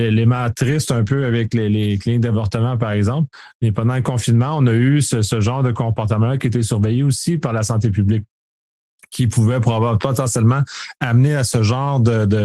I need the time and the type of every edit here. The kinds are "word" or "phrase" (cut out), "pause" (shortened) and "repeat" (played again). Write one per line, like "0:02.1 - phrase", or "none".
none